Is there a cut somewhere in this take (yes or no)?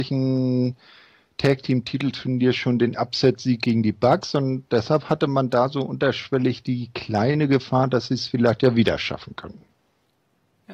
no